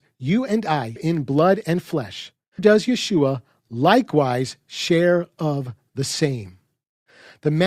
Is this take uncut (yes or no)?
no